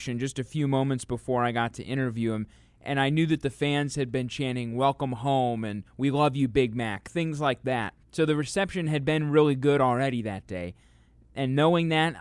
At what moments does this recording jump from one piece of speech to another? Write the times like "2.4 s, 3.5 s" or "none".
5.9 s, 8.0 s